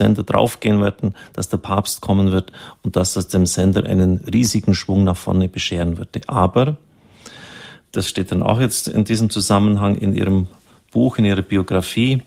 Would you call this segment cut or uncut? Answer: uncut